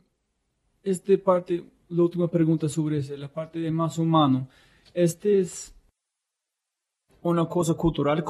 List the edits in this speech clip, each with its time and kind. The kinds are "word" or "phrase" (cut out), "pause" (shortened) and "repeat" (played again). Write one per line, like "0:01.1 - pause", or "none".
none